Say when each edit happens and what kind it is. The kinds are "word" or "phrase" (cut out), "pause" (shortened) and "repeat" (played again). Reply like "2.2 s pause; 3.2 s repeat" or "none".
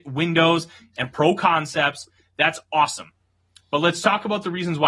none